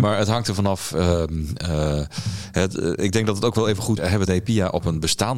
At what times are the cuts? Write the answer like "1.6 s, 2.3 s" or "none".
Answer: 4.0 s, 4.3 s